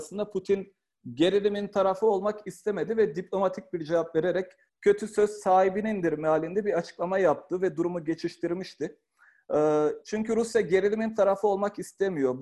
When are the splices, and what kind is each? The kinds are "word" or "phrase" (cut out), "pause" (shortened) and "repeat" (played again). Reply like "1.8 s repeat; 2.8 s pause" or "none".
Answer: 4.7 s pause